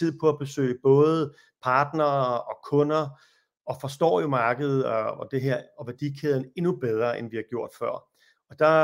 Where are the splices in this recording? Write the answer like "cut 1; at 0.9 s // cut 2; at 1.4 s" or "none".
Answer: none

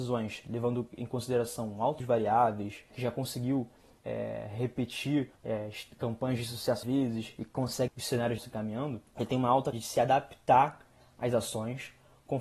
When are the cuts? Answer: cut 1; at 2.0 s // cut 2; at 2.9 s // cut 3; at 5.4 s // cut 4; at 6.8 s // cut 5; at 7.9 s // cut 6; at 8.4 s // cut 7; at 9.1 s // cut 8; at 9.7 s

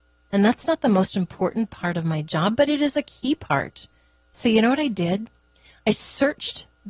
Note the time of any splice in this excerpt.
none

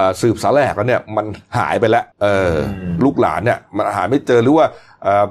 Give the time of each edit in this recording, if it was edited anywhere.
cut 1; at 2.1 s

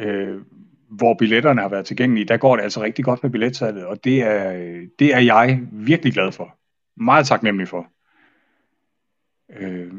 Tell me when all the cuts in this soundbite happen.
none

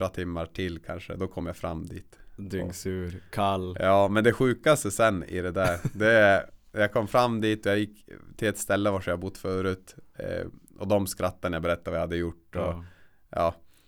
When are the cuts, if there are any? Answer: none

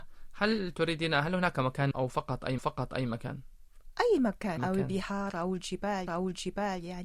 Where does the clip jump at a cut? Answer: cut 1; at 1.9 s // cut 2; at 2.6 s // cut 3; at 4.6 s // cut 4; at 6.1 s

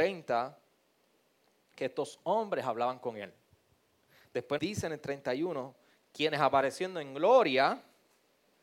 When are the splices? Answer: cut 1; at 4.6 s

